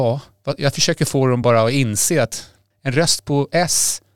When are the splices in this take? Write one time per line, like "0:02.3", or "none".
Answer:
none

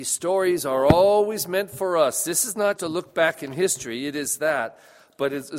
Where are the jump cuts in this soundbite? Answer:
0:02.8

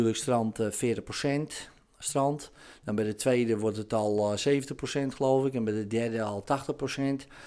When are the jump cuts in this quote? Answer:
none

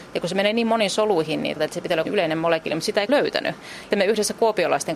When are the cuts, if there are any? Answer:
0:01.6
0:02.0
0:03.1
0:03.9

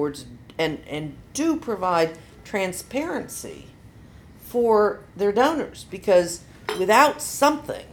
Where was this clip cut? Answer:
none

